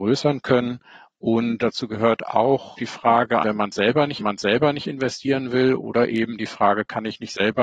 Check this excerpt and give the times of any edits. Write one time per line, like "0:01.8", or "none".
0:01.6
0:02.8
0:03.4
0:04.2